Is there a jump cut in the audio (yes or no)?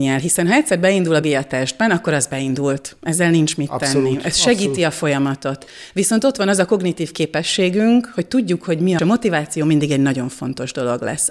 yes